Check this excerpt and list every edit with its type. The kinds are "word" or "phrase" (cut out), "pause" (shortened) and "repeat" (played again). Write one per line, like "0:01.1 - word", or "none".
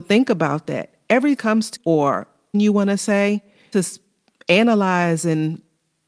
0:01.4 - phrase
0:01.8 - word
0:02.5 - word
0:03.7 - phrase